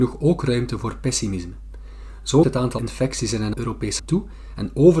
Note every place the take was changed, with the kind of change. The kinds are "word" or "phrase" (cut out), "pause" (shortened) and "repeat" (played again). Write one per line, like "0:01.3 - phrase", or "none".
0:02.4 - word
0:02.8 - word
0:03.5 - word
0:04.0 - word